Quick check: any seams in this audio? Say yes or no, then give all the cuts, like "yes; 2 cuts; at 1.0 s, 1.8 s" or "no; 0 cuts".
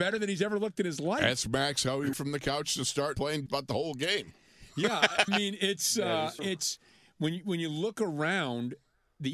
yes; 5 cuts; at 2.1 s, 3.1 s, 3.5 s, 5.3 s, 6.4 s